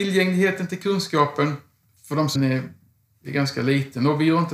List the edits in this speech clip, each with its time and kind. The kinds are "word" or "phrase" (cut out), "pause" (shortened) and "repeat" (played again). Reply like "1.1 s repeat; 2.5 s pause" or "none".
2.4 s phrase